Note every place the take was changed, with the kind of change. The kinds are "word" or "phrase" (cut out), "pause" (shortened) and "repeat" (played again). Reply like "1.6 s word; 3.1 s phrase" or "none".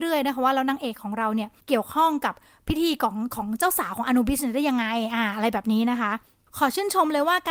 1.6 s pause

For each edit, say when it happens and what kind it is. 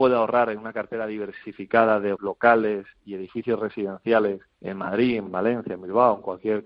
2.2 s word; 4.5 s pause; 5.3 s word

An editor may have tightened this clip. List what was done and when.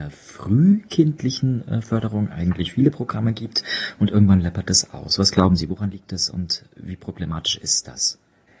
none

